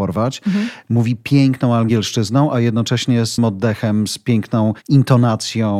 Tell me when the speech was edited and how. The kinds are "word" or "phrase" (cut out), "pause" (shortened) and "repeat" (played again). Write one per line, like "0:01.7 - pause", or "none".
0:03.4 - word